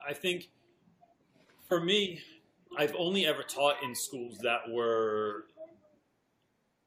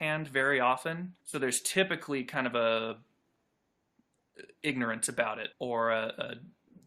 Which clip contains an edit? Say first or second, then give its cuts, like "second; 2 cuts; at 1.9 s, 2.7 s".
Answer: second; 2 cuts; at 1.2 s, 5.5 s